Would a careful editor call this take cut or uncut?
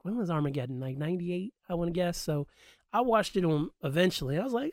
uncut